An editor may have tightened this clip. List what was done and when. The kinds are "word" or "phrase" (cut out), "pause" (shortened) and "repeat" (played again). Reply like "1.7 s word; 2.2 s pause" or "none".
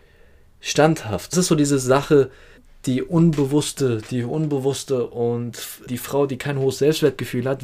1.3 s word; 2.6 s pause; 5.9 s word